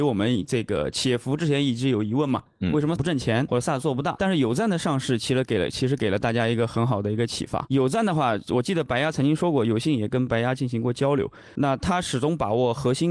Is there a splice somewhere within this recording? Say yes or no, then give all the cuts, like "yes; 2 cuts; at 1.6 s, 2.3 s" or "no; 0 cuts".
yes; 2 cuts; at 3.0 s, 3.5 s